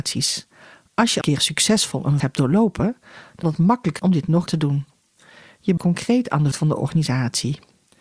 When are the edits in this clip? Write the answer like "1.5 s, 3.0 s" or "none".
1.2 s, 2.2 s, 3.4 s, 4.0 s, 4.5 s, 5.8 s, 6.5 s